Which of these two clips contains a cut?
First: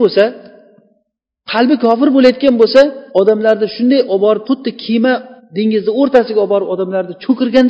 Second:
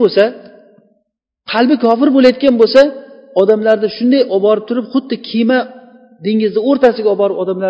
first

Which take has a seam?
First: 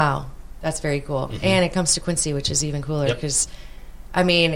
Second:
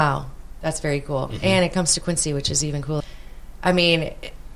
second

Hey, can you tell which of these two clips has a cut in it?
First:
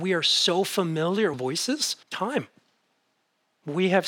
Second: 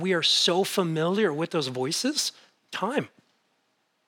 first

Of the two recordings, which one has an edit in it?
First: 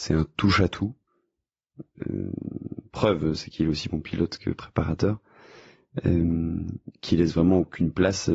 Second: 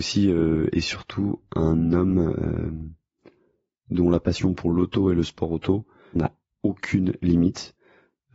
second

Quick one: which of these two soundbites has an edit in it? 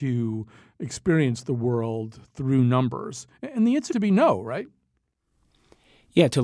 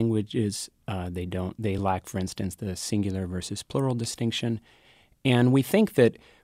first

